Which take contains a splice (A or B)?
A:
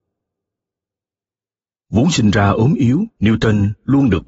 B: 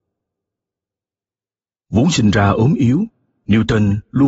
A